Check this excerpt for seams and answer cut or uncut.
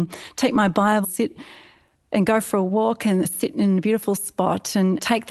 cut